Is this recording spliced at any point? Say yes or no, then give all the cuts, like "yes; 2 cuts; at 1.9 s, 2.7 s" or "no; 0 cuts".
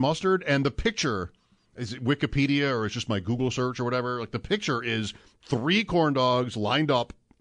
no; 0 cuts